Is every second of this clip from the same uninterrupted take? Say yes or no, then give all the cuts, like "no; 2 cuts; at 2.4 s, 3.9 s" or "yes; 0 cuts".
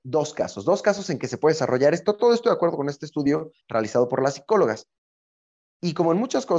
no; 1 cut; at 3.6 s